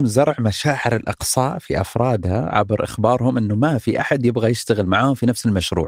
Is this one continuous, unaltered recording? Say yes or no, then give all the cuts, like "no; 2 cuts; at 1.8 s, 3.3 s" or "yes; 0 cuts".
yes; 0 cuts